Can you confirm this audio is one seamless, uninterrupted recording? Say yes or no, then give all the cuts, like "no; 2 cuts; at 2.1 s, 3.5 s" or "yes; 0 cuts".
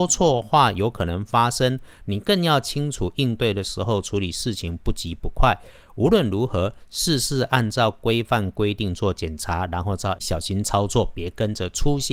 no; 1 cut; at 10.2 s